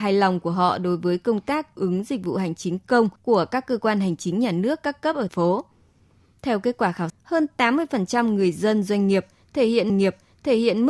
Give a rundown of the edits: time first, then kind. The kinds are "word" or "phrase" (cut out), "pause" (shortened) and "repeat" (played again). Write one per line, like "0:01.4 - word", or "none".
0:01.7 - word
0:03.2 - pause
0:05.3 - word
0:07.1 - word
0:09.9 - repeat